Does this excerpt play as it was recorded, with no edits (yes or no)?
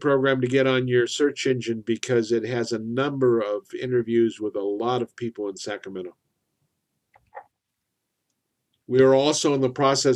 yes